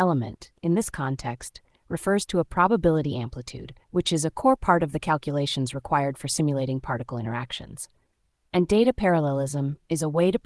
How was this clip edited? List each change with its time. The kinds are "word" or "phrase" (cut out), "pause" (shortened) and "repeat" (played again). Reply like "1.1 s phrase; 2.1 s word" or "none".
3.8 s pause